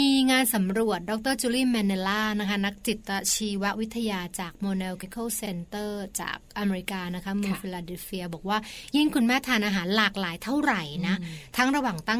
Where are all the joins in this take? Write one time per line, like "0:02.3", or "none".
0:05.0
0:05.5